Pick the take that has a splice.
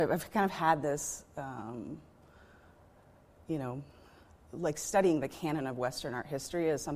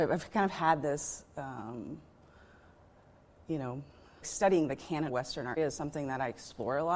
second; 3 cuts; at 4.2 s, 5.1 s, 5.6 s

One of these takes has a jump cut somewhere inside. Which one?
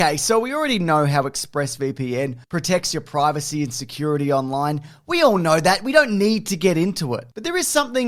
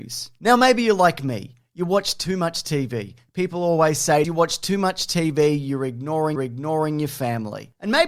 second; 2 cuts; at 4.2 s, 6.4 s

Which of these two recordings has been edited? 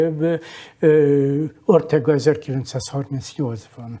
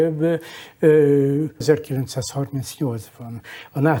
second; 1 cut; at 1.6 s

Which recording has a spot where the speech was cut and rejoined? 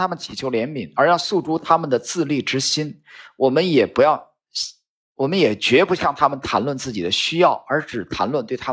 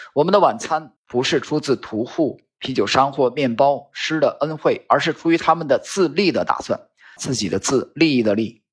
second; 2 cuts; at 1.0 s, 7.2 s

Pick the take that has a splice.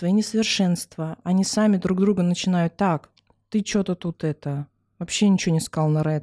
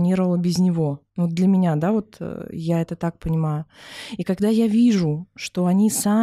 second; 1 cut; at 1.1 s

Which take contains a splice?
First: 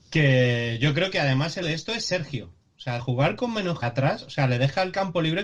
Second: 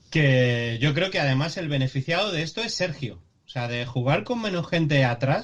first; 3 cuts; at 1.6 s, 3.0 s, 3.8 s

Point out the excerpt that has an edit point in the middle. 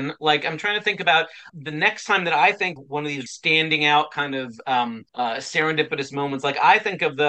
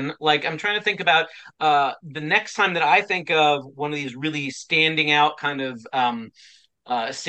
first; 4 cuts; at 1.5 s, 2.8 s, 3.3 s, 5.1 s

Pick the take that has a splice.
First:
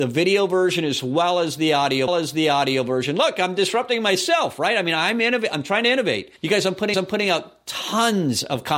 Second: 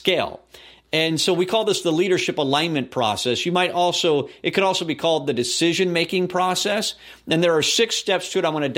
first; 3 cuts; at 2.1 s, 6.4 s, 6.9 s

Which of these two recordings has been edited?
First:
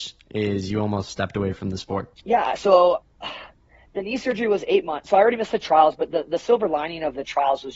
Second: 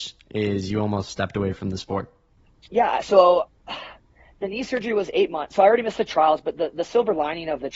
first; 1 cut; at 2.1 s

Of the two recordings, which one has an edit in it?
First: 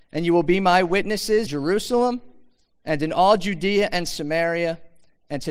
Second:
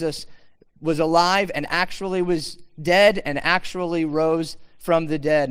first; 1 cut; at 1.5 s

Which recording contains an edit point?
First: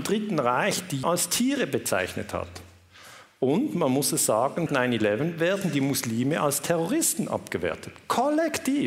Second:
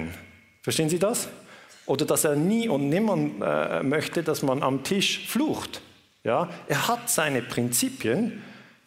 first; 2 cuts; at 1.0 s, 4.7 s

